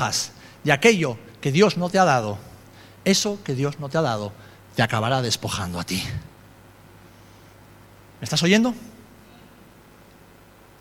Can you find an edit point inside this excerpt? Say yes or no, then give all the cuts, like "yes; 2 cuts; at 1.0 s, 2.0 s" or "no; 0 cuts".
no; 0 cuts